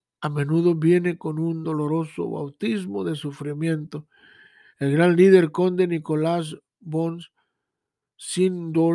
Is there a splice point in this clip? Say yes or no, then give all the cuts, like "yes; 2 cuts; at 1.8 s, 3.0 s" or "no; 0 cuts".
no; 0 cuts